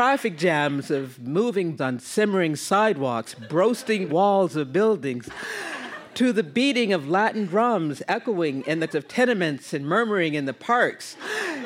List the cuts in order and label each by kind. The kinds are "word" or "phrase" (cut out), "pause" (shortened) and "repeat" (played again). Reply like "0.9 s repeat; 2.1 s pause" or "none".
1.8 s word; 4.1 s word; 8.9 s word